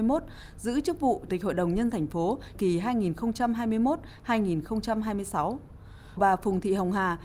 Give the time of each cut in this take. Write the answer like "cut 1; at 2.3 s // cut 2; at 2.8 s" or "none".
cut 1; at 1.3 s // cut 2; at 1.9 s // cut 3; at 2.5 s // cut 4; at 6.2 s